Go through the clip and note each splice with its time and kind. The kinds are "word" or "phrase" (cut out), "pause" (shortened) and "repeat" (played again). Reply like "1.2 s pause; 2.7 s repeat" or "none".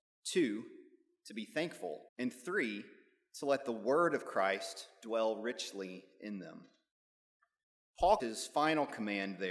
2.1 s pause; 8.2 s word